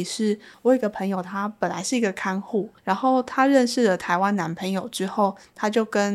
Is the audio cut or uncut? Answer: cut